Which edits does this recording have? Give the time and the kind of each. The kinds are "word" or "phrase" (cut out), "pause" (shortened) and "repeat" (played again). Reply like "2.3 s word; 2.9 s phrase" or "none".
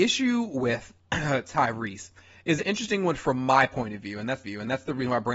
2.6 s word; 4.4 s repeat